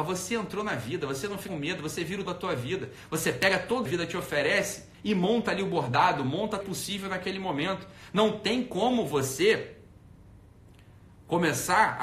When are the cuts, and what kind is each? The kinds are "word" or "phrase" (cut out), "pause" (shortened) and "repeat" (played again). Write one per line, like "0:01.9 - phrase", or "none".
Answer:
0:01.5 - word
0:02.3 - word
0:03.9 - phrase
0:04.9 - pause
0:06.6 - word